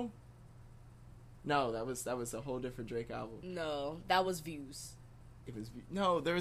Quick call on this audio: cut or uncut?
uncut